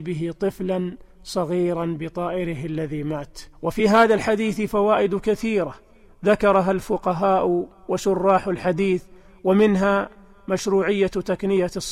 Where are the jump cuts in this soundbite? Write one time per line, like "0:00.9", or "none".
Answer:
none